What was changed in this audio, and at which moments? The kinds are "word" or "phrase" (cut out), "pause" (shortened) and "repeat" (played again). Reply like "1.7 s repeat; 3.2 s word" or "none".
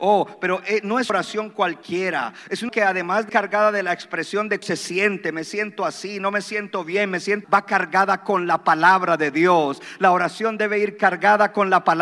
1.1 s word; 2.7 s word; 3.3 s word; 4.6 s word; 7.4 s word